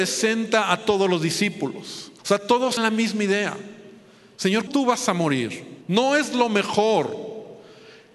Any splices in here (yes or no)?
yes